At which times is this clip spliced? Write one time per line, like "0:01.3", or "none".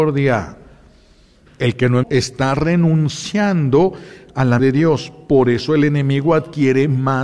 0:02.0
0:04.6